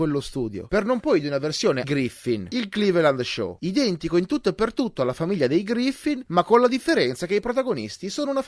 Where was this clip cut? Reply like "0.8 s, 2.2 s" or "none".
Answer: 1.0 s, 1.8 s